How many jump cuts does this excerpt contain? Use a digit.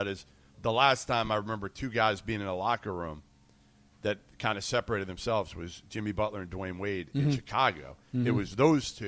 0